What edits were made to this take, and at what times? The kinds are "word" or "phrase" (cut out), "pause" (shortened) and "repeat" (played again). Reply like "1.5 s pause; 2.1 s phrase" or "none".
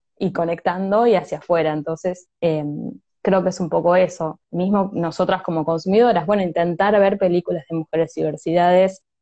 2.3 s pause; 4.4 s pause